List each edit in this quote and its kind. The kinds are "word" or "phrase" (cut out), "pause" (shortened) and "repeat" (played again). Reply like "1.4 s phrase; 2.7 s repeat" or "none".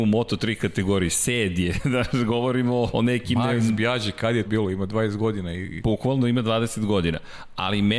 2.9 s word; 4.4 s word